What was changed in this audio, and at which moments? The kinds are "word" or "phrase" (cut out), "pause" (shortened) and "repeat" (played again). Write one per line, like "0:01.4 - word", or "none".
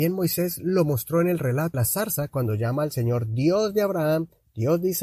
0:01.7 - word

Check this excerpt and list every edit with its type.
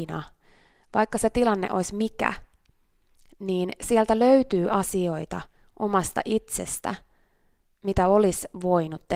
none

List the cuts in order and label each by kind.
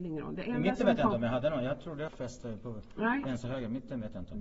0:02.1 - word

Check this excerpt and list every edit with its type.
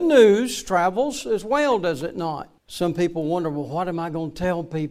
0:02.6 - pause

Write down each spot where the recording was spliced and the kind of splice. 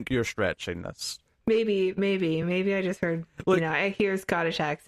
none

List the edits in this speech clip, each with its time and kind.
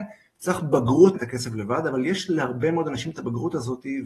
0:01.1 - phrase

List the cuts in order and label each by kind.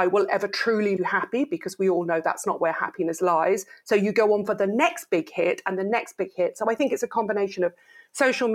0:01.0 - word

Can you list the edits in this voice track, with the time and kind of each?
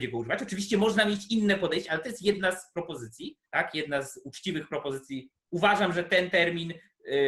0:03.5 - pause
0:05.4 - pause

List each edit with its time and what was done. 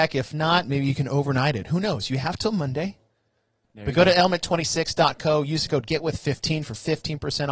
none

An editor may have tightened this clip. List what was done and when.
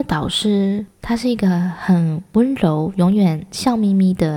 0:00.9 - pause

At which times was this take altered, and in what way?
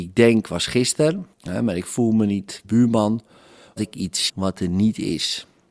0:01.3 - pause
0:02.6 - phrase
0:03.8 - word
0:04.3 - word

